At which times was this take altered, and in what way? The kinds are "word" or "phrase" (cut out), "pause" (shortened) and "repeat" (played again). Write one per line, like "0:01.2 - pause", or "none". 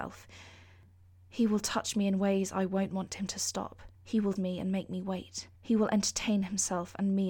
0:03.9 - pause
0:04.4 - word
0:05.5 - pause